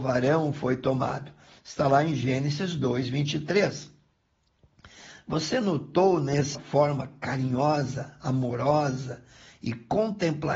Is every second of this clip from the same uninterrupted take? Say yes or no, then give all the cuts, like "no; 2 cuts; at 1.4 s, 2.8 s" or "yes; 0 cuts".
no; 1 cut; at 6.5 s